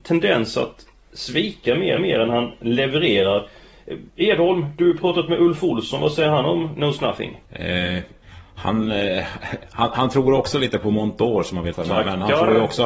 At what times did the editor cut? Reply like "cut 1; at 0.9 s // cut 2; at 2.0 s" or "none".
cut 1; at 2.0 s // cut 2; at 4.1 s // cut 3; at 7.5 s // cut 4; at 11.7 s

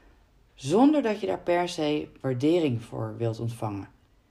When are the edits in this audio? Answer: none

